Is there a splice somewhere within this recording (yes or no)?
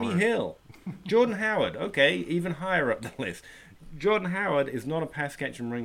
no